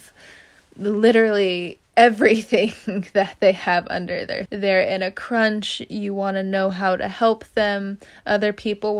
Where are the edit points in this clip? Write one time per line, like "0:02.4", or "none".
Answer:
0:01.9
0:04.5